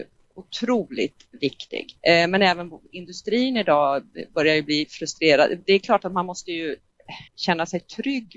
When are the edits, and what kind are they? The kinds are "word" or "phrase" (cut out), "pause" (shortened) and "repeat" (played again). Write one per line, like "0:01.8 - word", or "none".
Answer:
0:02.0 - pause
0:07.3 - pause